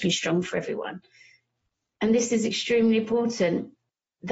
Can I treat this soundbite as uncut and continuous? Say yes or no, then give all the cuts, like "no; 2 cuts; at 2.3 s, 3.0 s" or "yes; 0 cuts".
yes; 0 cuts